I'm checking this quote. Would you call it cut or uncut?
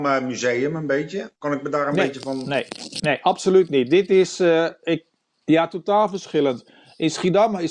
uncut